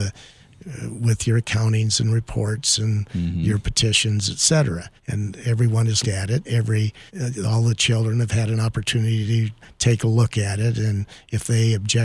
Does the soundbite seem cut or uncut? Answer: cut